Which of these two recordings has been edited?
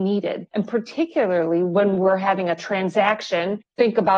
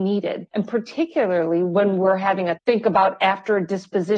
second; 1 cut; at 2.6 s

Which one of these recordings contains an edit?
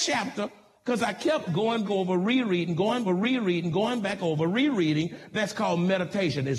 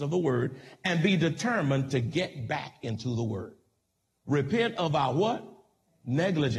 first; 3 cuts; at 1.5 s, 1.8 s, 3.1 s

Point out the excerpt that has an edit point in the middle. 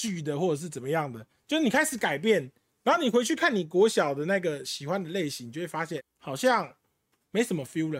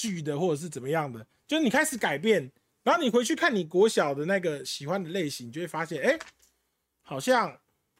first; 1 cut; at 6.0 s

